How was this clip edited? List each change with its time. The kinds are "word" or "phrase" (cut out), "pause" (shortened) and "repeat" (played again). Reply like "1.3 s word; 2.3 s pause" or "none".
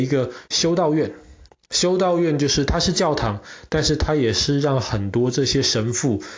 none